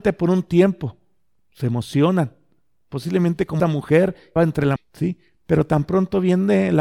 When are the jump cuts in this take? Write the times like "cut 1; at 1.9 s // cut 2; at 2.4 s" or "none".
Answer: cut 1; at 3.6 s // cut 2; at 4.4 s // cut 3; at 4.8 s